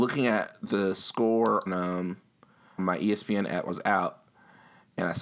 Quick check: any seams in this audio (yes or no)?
yes